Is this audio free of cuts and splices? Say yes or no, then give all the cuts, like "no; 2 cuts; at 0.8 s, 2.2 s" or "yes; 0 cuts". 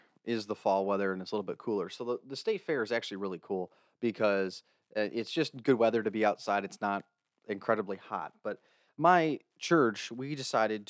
yes; 0 cuts